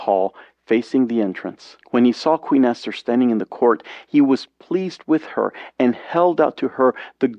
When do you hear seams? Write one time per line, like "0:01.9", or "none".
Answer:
0:01.8